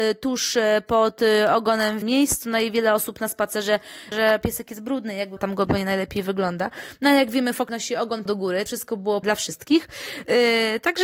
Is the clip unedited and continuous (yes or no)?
no